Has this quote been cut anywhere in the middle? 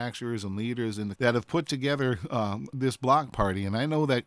yes; 2 cuts; at 1.2 s, 2.7 s

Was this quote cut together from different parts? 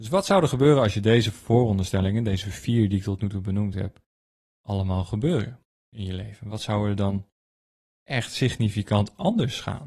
no; 0 cuts

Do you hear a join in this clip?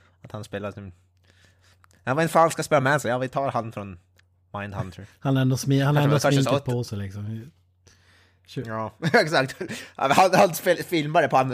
no; 0 cuts

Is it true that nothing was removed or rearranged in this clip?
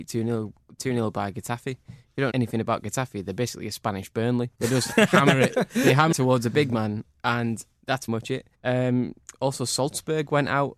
no; 5 cuts; at 2.3 s, 4.5 s, 6.1 s, 8.1 s, 8.5 s

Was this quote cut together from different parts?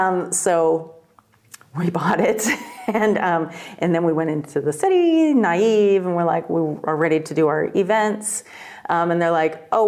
no; 0 cuts

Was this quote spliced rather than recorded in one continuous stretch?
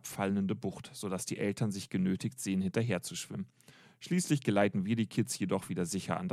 no; 0 cuts

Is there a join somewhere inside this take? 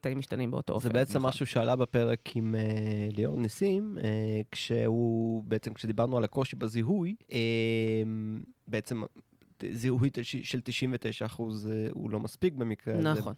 yes; 1 cut; at 7.2 s

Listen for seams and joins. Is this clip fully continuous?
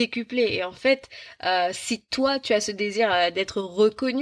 yes; 0 cuts

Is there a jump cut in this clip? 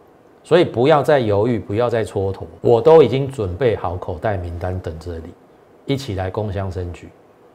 yes; 1 cut; at 2.6 s

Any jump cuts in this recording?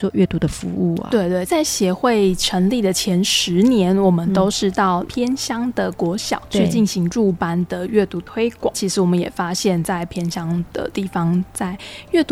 yes; 1 cut; at 1.5 s

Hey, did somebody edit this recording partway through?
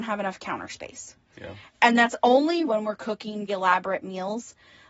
yes; 2 cuts; at 2.7 s, 3.5 s

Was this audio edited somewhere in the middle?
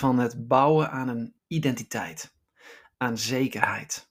yes; 1 cut; at 1.4 s

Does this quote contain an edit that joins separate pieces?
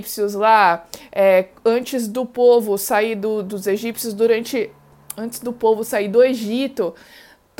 no; 0 cuts

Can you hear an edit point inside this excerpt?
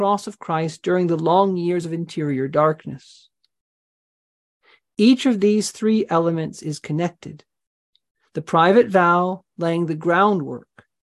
no; 0 cuts

